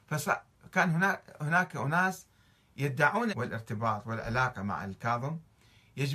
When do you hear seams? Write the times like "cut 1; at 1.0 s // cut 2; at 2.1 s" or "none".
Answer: cut 1; at 3.3 s